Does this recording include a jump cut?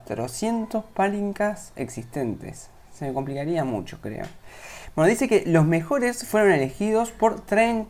no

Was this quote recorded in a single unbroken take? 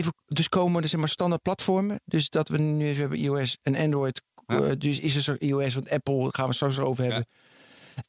yes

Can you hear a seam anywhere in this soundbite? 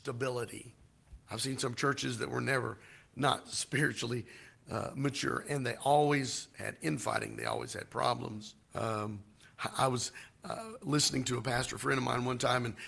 yes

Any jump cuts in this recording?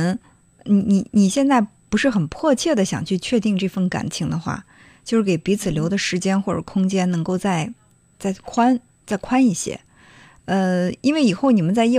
no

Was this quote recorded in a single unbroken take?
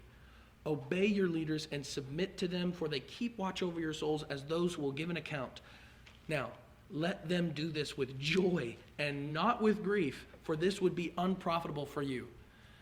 yes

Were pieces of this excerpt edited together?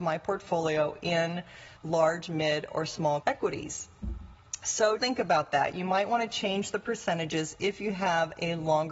yes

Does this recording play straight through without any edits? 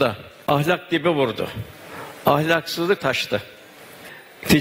no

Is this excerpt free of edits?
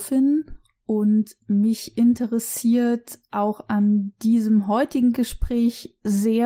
yes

